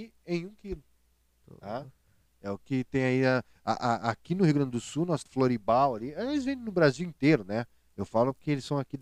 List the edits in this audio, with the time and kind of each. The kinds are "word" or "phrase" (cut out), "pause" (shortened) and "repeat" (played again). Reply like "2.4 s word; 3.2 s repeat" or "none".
2.6 s word; 5.3 s phrase